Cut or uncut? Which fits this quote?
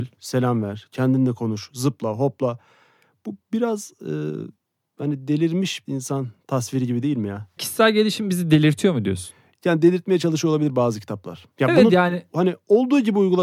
cut